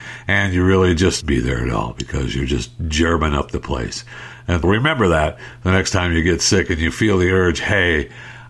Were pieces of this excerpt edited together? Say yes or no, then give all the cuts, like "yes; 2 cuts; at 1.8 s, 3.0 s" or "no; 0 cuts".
yes; 2 cuts; at 1.2 s, 4.6 s